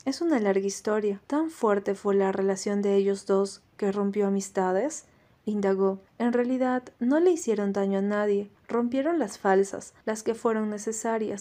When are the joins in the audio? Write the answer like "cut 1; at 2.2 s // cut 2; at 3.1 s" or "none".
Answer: cut 1; at 1.2 s // cut 2; at 6.1 s // cut 3; at 8.6 s // cut 4; at 10.0 s